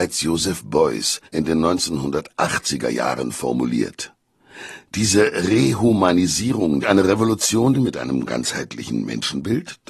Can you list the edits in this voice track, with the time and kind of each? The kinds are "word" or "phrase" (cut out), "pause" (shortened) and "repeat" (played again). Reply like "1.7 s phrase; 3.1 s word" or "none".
1.3 s pause; 6.8 s phrase; 7.7 s phrase